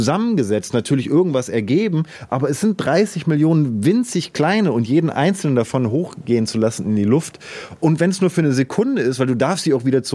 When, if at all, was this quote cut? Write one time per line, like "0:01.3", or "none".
none